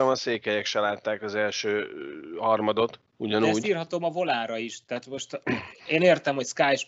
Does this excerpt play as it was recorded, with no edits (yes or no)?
yes